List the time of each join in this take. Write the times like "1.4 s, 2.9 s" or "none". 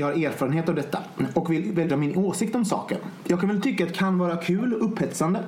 1.9 s, 3.9 s